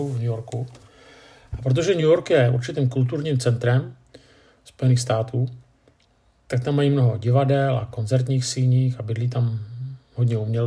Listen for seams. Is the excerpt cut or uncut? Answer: uncut